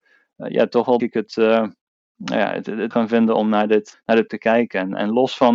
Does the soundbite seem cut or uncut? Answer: cut